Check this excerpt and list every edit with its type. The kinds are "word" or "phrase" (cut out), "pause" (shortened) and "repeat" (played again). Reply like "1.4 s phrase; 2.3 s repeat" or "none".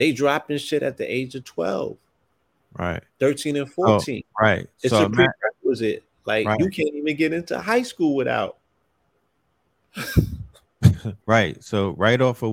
3.1 s pause; 4.7 s pause; 11.2 s pause